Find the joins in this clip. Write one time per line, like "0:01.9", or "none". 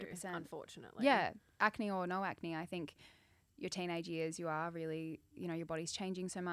none